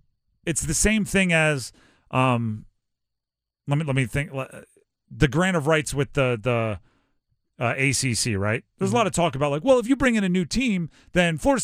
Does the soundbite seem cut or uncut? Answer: uncut